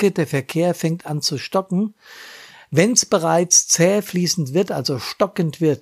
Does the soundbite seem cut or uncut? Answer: uncut